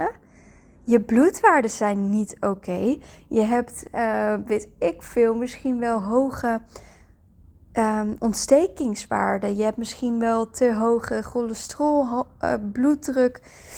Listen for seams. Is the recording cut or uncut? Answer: uncut